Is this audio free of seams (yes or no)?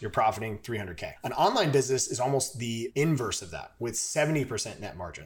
yes